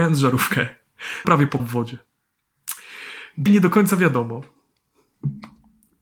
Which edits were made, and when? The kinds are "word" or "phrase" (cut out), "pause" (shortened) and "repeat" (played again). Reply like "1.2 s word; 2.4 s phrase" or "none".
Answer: 1.2 s word; 1.6 s word; 3.5 s word